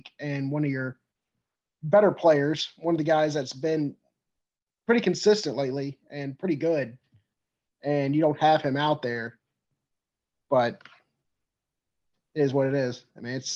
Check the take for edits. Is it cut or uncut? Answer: uncut